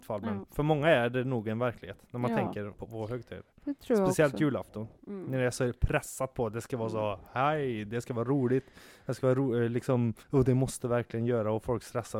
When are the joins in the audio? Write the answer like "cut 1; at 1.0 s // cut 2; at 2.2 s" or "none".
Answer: cut 1; at 2.7 s // cut 2; at 10.2 s